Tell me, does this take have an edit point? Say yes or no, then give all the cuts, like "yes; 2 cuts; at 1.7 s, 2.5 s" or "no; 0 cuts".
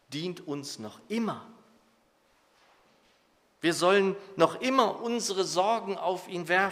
no; 0 cuts